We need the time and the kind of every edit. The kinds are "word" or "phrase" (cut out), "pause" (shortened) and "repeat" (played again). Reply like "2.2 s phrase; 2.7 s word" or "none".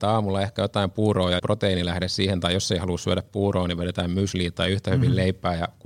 1.4 s word

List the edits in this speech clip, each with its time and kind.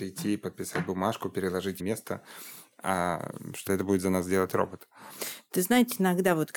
1.8 s phrase; 3.7 s phrase

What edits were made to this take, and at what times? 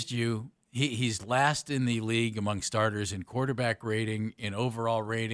none

